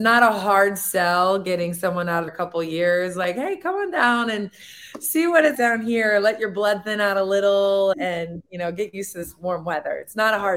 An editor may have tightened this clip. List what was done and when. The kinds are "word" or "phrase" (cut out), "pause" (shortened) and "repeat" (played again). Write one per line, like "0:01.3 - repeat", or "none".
0:02.3 - phrase
0:05.5 - word
0:07.9 - word